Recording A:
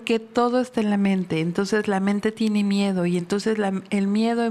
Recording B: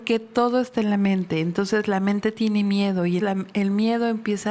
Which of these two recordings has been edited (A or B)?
B